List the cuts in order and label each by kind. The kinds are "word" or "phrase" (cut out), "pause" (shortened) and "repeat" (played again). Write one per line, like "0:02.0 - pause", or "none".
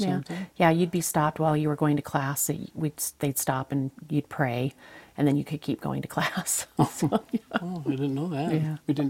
none